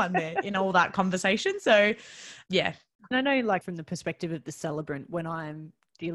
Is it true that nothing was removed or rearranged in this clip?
no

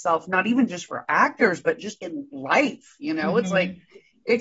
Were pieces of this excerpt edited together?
yes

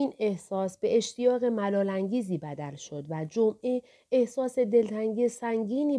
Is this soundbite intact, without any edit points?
yes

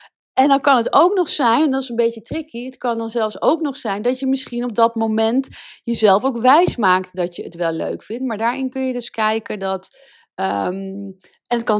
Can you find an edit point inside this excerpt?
no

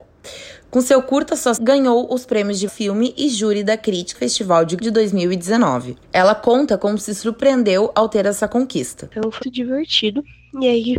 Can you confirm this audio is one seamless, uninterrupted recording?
no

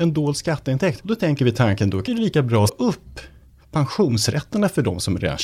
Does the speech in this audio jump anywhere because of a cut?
yes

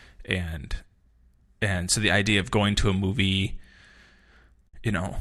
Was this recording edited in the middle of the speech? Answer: no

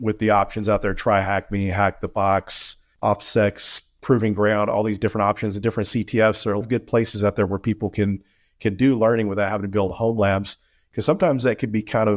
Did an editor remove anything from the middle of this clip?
yes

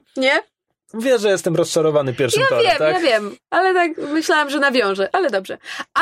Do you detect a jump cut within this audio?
no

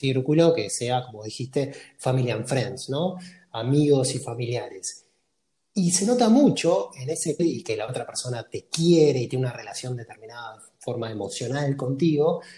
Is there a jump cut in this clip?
yes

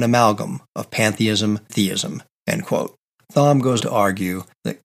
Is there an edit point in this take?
yes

